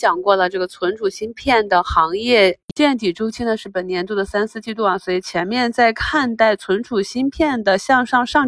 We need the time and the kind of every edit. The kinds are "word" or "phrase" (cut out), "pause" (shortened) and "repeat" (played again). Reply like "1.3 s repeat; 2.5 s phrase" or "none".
none